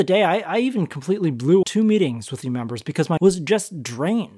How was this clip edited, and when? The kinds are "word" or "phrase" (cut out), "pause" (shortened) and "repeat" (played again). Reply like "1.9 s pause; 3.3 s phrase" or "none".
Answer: 1.6 s word; 2.4 s word; 3.2 s word